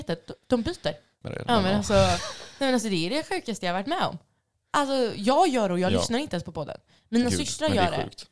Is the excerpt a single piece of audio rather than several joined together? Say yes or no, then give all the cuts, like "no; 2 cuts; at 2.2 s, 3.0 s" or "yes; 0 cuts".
yes; 0 cuts